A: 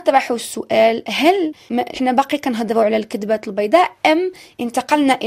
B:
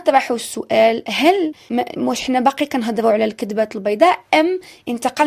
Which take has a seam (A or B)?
A